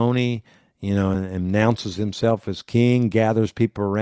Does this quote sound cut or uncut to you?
uncut